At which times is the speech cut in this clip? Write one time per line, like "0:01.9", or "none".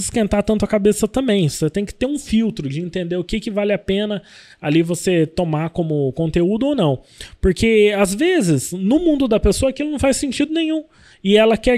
none